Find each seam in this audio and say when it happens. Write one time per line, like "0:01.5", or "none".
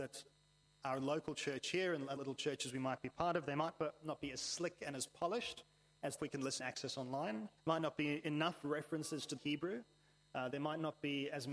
0:02.2
0:06.2
0:06.6
0:07.6
0:09.4